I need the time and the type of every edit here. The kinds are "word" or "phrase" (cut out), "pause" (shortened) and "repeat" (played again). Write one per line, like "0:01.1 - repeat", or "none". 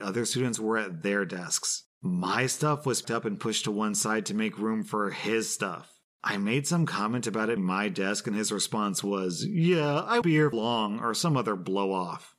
0:03.0 - word
0:07.6 - word
0:10.2 - word
0:10.5 - word